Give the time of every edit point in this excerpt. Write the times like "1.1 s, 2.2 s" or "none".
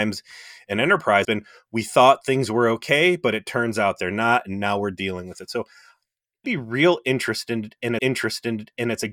1.2 s, 6.4 s, 8.0 s